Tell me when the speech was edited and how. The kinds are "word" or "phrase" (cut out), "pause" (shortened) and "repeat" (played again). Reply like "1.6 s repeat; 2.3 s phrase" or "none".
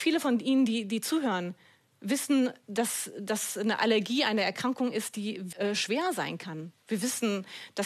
5.5 s word